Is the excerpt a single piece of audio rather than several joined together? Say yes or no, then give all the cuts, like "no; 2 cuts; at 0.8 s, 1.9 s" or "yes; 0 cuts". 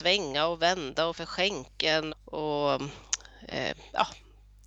no; 2 cuts; at 1.1 s, 2.1 s